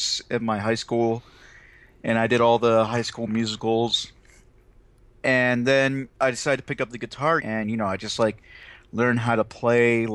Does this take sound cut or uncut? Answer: cut